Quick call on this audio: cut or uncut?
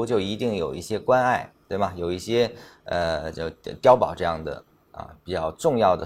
uncut